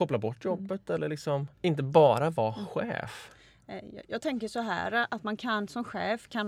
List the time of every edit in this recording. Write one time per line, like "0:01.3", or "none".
0:01.5